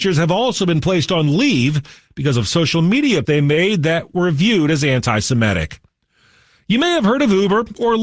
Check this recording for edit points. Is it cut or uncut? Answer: cut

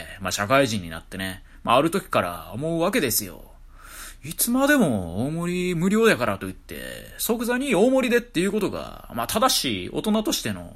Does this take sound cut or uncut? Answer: uncut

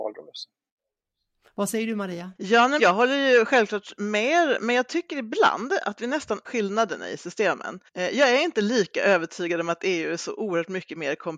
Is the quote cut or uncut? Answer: cut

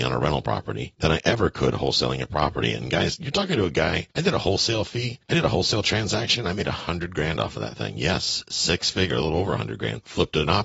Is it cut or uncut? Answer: uncut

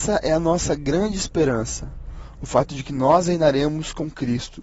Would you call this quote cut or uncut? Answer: uncut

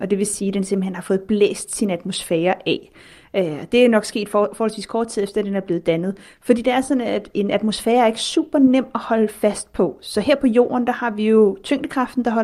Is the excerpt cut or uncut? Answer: uncut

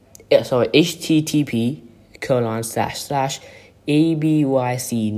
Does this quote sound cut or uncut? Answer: uncut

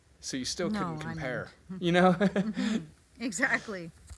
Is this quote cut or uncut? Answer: uncut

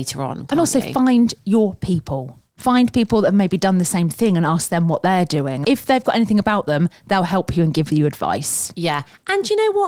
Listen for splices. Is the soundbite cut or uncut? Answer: cut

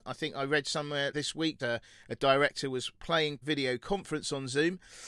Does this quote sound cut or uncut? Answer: cut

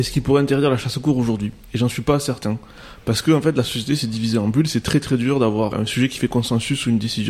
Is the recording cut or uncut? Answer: cut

